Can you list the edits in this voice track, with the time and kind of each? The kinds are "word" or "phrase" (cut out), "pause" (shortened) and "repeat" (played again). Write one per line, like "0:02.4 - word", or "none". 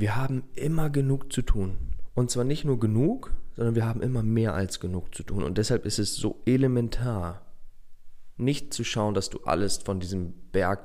none